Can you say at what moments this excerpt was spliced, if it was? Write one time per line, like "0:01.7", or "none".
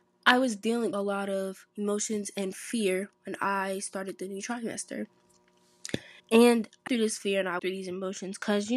0:00.9
0:01.7
0:03.1
0:06.2
0:06.9
0:07.6